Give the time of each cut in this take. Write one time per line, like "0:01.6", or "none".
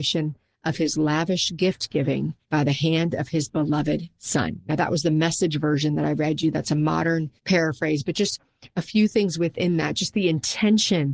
0:02.4
0:07.4